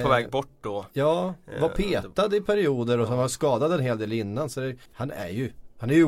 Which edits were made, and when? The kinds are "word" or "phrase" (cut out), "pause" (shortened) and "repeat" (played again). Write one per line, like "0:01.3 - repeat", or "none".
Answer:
0:04.9 - pause